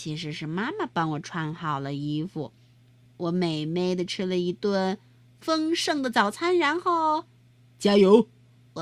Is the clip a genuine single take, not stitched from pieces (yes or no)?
yes